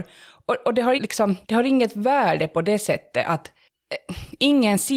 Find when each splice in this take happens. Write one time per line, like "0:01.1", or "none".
0:01.0
0:01.4